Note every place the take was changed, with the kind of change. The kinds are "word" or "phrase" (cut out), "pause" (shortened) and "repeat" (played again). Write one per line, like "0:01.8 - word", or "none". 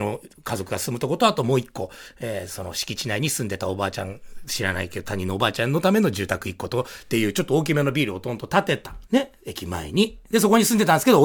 0:09.1 - pause

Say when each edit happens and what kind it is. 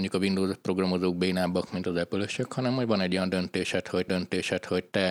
0:04.1 - repeat

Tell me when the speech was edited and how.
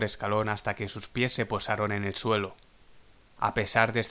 none

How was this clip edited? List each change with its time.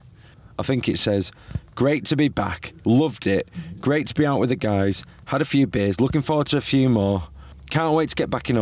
none

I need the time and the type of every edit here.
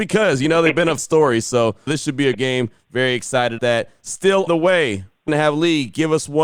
0:01.0 - word
0:01.9 - word
0:02.3 - word
0:03.6 - word
0:04.5 - word
0:05.3 - word

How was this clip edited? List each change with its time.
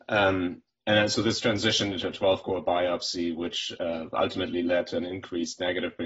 none

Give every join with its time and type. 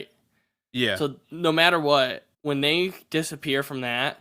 0:02.3 - pause

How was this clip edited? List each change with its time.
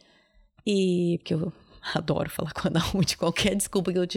none

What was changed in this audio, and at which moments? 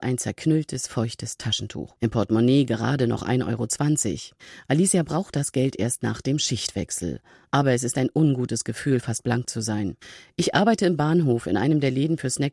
0:02.0 - pause

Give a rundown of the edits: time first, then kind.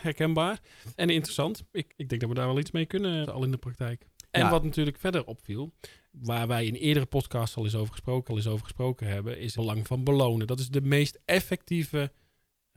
0:01.0 - word
0:01.9 - word
0:03.2 - word
0:06.1 - word
0:08.3 - repeat
0:09.5 - word

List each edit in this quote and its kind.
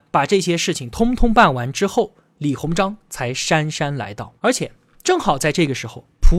0:04.4 - pause

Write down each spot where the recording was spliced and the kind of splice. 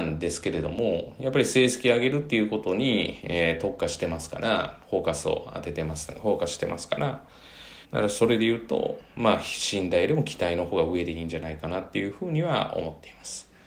0:07.8 - pause

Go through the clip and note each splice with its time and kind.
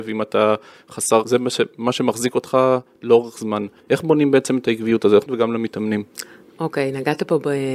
0:01.2 - word
0:03.8 - pause
0:05.3 - phrase

